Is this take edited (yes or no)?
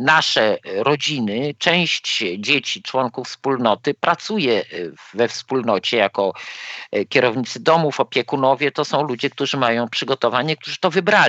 no